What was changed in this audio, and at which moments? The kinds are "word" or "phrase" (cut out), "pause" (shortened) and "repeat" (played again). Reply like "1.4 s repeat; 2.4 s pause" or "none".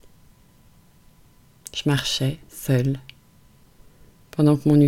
2.4 s pause